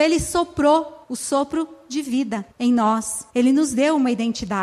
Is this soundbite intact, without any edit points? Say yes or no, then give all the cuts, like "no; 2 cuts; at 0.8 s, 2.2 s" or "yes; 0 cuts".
no; 3 cuts; at 1.0 s, 2.5 s, 3.3 s